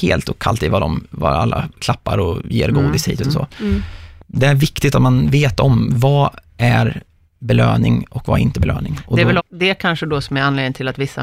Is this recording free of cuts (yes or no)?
no